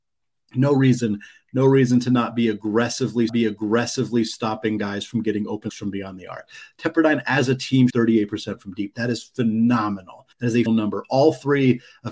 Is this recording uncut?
no; 5 cuts; at 3.3 s, 5.7 s, 7.9 s, 10.3 s, 10.7 s

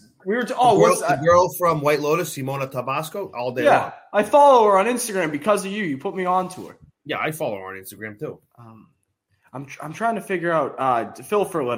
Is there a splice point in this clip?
no; 0 cuts

